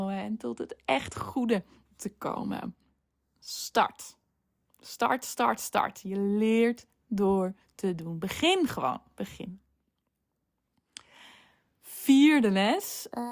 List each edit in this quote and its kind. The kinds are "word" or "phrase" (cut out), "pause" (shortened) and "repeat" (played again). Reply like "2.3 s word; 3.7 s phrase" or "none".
none